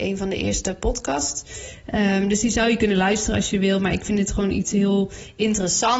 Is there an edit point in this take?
no; 0 cuts

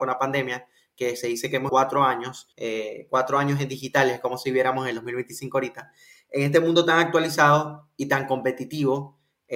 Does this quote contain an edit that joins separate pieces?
yes; 2 cuts; at 1.7 s, 2.5 s

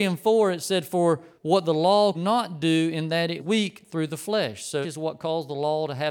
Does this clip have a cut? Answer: yes; 4 cuts; at 1.4 s, 2.1 s, 3.4 s, 4.8 s

